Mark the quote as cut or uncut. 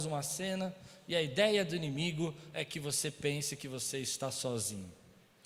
uncut